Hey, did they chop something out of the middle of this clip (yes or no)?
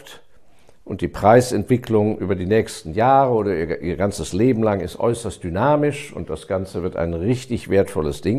no